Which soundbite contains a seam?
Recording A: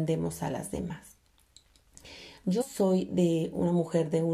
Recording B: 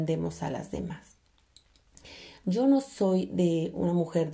A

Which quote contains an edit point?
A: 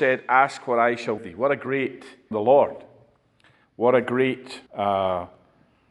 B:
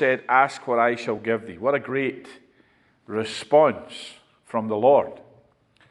A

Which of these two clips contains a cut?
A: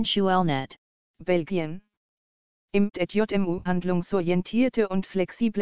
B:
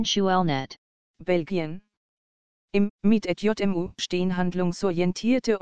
A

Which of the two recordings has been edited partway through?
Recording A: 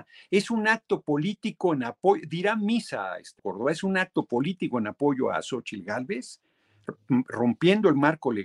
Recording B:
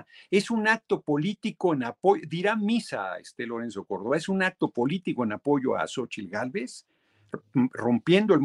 A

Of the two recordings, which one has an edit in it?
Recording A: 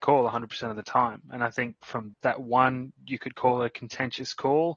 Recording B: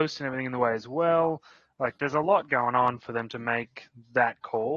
A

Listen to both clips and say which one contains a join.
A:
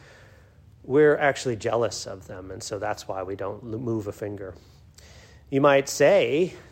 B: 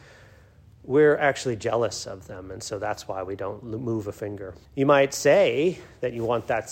B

